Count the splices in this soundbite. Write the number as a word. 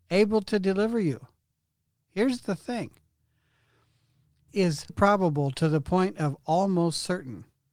two